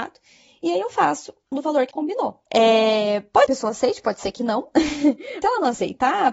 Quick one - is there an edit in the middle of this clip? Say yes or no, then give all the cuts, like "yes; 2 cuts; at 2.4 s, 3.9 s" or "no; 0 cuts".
yes; 5 cuts; at 1.5 s, 1.9 s, 2.5 s, 3.5 s, 5.4 s